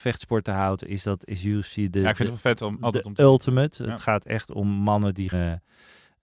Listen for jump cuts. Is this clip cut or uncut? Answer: cut